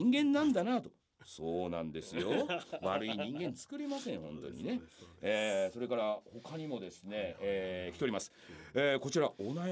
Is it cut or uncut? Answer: uncut